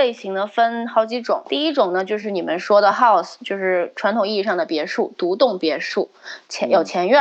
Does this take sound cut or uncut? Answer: uncut